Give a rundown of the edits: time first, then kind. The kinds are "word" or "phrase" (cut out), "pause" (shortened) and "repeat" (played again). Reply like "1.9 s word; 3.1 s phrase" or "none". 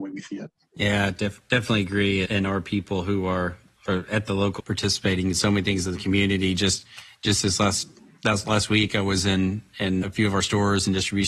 2.2 s word; 4.6 s word; 10.0 s word